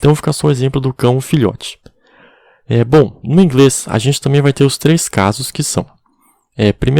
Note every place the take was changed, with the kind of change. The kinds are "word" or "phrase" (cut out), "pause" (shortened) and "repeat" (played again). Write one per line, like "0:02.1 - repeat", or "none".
none